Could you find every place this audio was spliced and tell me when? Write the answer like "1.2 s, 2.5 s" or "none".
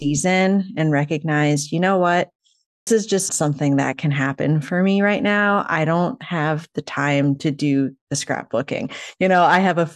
2.9 s, 3.3 s